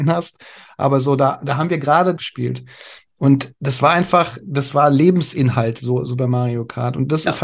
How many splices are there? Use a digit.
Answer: 2